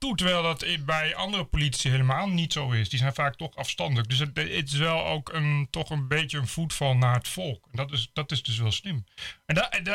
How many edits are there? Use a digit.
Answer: 0